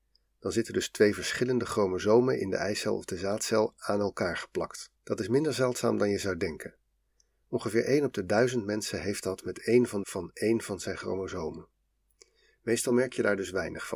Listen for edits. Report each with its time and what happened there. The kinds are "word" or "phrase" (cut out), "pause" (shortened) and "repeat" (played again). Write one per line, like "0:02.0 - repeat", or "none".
0:05.0 - pause
0:10.0 - phrase